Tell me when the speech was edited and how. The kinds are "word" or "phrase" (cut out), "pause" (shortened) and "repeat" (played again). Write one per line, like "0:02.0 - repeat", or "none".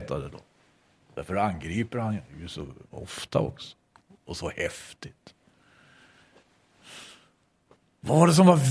none